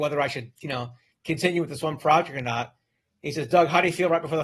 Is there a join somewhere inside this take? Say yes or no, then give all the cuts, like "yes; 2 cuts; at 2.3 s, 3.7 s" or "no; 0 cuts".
no; 0 cuts